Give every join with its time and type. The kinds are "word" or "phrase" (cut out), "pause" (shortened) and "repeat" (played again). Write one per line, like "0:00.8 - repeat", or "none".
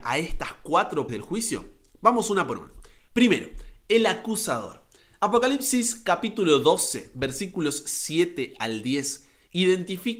0:01.1 - word